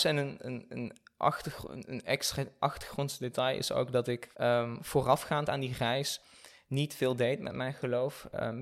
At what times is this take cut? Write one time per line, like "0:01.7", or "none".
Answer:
0:04.3